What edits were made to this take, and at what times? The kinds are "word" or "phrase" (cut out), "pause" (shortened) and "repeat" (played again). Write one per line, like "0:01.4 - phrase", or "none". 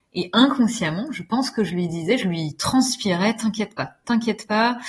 none

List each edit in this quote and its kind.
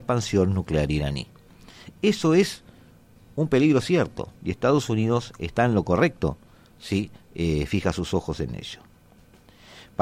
0:04.4 - pause

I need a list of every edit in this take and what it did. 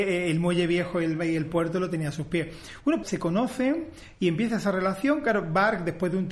0:03.0 - word

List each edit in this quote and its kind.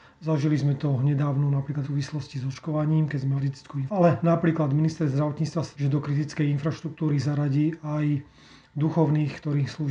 0:01.8 - word
0:03.4 - word
0:03.9 - word
0:05.7 - word

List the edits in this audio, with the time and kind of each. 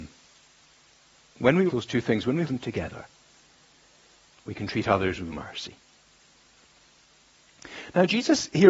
0:01.7 - word
0:02.4 - word
0:05.3 - word

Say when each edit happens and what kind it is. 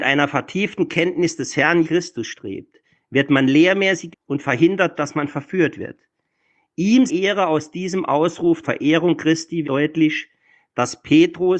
0:01.8 - word
0:04.1 - word
0:04.9 - word
0:07.1 - word
0:08.6 - word
0:09.6 - word

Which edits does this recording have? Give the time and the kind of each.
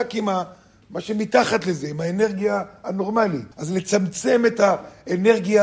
0:03.5 - pause

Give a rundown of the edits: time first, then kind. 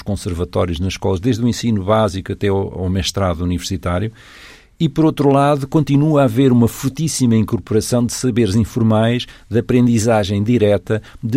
none

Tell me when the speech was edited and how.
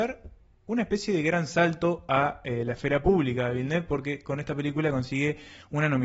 none

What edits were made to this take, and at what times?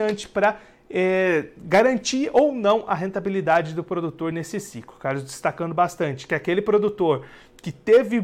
none

